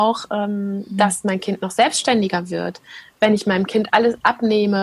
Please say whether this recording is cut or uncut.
uncut